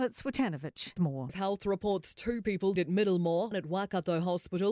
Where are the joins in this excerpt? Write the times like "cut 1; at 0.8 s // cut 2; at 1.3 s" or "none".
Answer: cut 1; at 1.0 s // cut 2; at 1.3 s // cut 3; at 2.8 s // cut 4; at 3.5 s